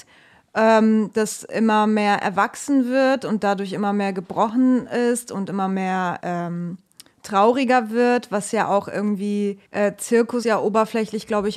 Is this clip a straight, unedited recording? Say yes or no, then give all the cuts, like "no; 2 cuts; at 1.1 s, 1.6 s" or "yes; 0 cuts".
no; 4 cuts; at 6.2 s, 7.1 s, 9.7 s, 10.4 s